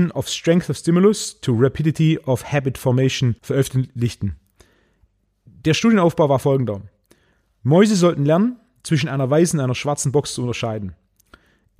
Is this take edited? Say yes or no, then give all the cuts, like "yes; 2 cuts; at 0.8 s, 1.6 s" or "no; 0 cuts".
yes; 1 cut; at 3.4 s